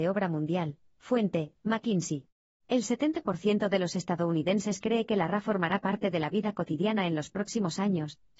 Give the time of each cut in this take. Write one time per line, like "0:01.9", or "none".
0:02.5